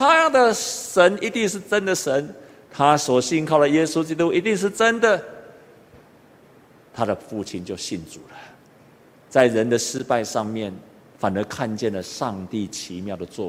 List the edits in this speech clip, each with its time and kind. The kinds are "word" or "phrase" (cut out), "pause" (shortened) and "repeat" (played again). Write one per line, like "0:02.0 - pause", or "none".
0:08.8 - pause